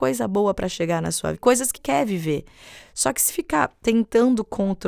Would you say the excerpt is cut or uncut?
cut